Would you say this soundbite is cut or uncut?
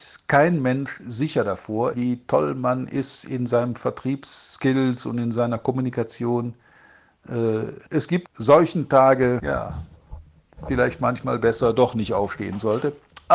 cut